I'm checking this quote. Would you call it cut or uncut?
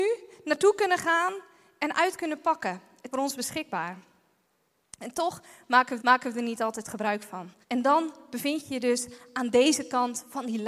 cut